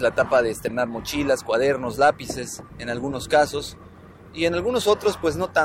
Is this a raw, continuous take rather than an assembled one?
no; 1 cut; at 2.7 s

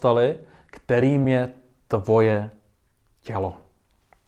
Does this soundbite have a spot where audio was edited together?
no; 0 cuts

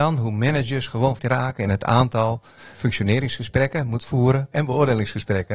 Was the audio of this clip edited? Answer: yes; 4 cuts; at 1.2 s, 2.7 s, 4.0 s, 4.5 s

